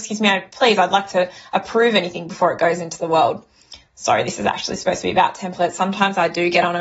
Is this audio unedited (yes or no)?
yes